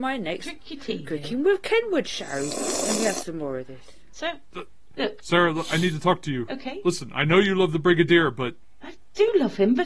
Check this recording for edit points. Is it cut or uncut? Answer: uncut